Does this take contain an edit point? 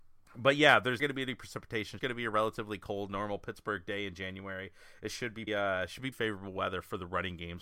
yes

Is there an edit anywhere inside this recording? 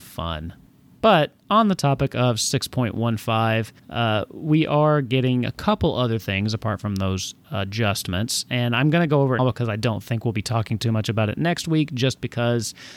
yes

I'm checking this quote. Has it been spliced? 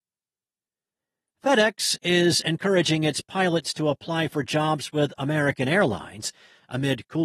no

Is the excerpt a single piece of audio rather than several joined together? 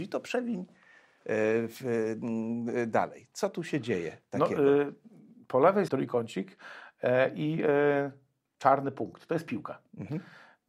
no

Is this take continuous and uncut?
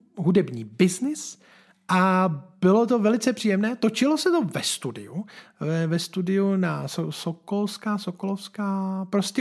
yes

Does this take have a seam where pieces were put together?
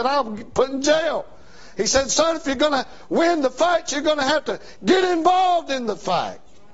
no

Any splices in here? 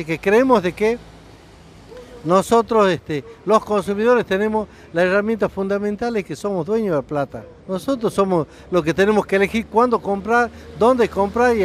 yes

